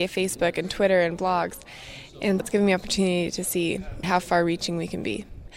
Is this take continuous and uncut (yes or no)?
no